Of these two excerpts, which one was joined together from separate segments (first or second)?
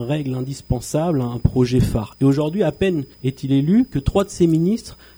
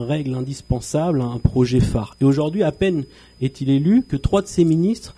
first